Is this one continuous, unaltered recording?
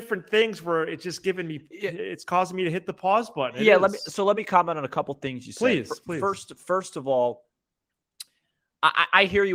yes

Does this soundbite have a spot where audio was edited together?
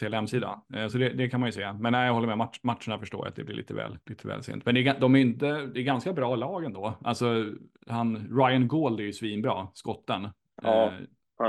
yes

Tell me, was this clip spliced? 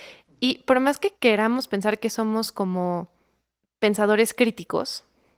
yes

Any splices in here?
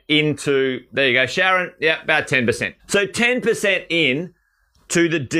yes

